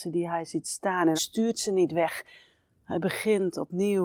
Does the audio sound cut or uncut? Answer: cut